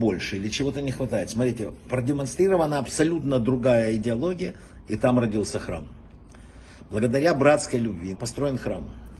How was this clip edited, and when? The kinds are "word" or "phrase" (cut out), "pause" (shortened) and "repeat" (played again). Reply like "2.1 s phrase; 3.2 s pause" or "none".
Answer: 8.1 s word